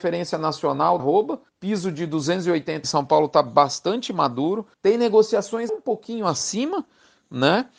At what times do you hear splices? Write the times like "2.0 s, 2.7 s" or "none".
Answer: 1.0 s, 1.5 s, 2.8 s, 4.7 s, 5.7 s